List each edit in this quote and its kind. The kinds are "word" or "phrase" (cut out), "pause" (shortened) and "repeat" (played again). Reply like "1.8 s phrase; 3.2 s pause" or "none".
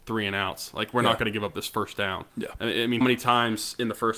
2.3 s pause; 3.0 s word